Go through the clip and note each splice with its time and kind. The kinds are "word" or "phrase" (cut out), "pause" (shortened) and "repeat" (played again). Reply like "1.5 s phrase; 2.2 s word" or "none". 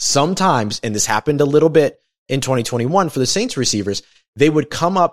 none